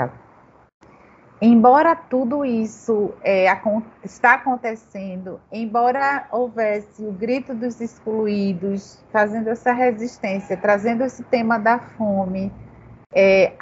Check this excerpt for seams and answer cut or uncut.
uncut